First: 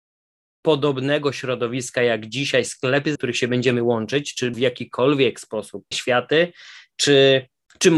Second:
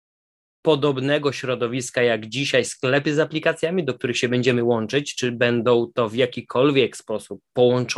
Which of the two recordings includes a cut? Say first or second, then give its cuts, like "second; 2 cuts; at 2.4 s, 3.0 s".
first; 3 cuts; at 3.2 s, 4.5 s, 5.9 s